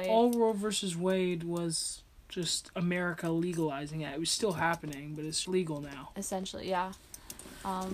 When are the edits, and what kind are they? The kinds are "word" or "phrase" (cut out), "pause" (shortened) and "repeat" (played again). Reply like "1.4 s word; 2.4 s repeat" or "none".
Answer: 5.4 s word

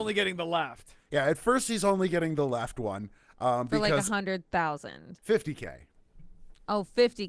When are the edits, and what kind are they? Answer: none

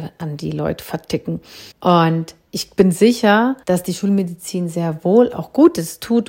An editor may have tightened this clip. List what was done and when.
1.7 s pause; 3.6 s pause

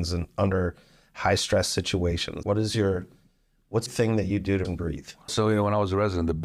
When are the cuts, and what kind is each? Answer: 2.4 s word; 3.9 s word; 4.6 s word; 5.3 s word

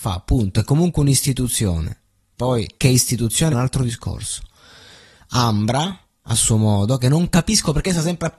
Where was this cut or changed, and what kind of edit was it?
2.8 s pause; 3.5 s word

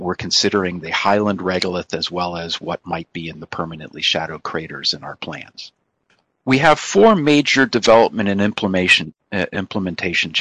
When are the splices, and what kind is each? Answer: none

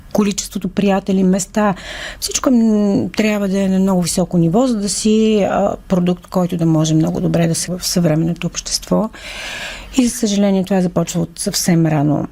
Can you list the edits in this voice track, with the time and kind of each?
7.7 s word

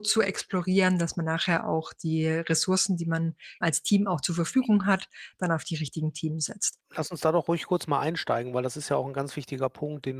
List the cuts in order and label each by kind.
3.6 s word

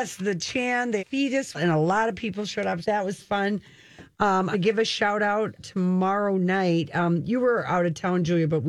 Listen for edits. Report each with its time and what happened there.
1.0 s word; 1.5 s word; 2.8 s word; 3.2 s word; 4.5 s word; 5.6 s word

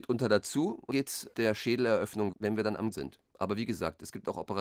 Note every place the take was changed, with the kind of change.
0.9 s word; 1.3 s word; 2.3 s word; 2.9 s word

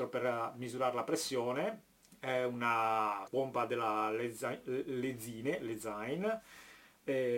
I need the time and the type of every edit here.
2.0 s pause; 3.3 s word

